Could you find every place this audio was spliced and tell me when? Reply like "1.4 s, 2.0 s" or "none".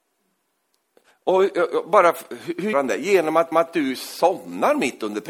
2.7 s, 3.5 s